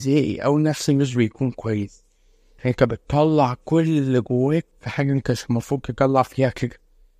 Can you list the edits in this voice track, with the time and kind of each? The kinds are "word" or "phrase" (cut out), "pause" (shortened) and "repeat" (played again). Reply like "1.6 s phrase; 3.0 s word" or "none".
4.7 s pause